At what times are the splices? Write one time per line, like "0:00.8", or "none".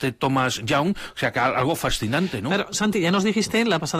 none